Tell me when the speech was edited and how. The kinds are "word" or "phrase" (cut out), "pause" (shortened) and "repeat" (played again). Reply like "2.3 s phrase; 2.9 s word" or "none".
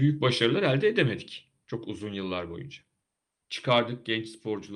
none